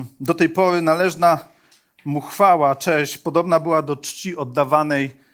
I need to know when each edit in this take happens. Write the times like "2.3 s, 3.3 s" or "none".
none